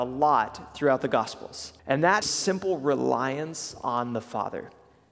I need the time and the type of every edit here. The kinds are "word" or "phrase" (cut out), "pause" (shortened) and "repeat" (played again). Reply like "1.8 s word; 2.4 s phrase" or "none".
1.8 s pause; 2.2 s phrase